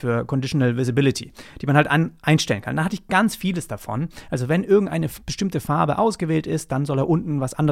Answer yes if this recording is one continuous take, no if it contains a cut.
yes